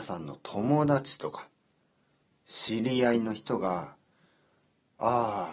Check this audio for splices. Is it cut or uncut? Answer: uncut